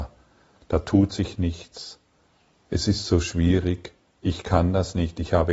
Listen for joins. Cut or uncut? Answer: uncut